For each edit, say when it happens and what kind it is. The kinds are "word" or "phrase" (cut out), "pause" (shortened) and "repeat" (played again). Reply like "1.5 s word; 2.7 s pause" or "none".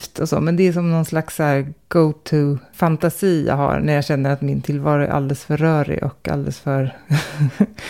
none